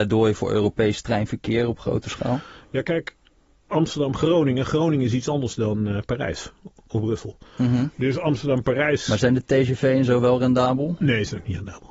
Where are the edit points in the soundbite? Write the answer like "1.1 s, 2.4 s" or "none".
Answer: none